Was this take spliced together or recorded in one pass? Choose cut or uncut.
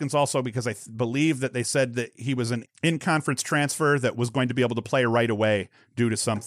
cut